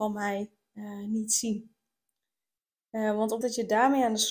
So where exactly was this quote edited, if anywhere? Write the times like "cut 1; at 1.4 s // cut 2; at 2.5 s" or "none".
cut 1; at 3.4 s

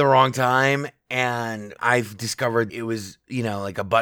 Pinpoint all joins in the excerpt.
cut 1; at 1.8 s // cut 2; at 2.7 s

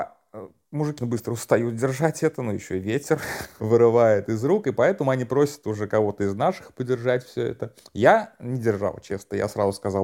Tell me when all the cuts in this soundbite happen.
cut 1; at 1.0 s // cut 2; at 3.6 s

